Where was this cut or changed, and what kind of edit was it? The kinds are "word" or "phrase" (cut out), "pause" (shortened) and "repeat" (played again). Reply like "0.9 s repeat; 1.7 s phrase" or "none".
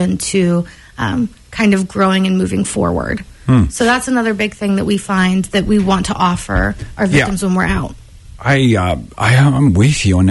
none